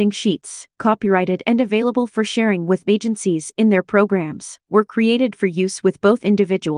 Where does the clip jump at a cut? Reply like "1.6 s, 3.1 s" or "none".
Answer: none